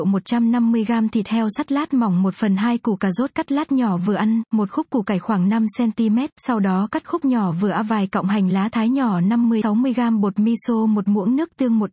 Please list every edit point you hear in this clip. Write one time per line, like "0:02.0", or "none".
0:09.6